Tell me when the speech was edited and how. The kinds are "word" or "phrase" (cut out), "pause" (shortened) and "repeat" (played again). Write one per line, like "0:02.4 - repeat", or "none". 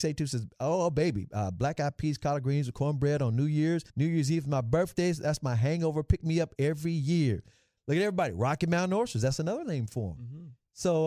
0:03.9 - pause